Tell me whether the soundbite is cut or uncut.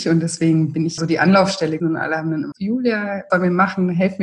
cut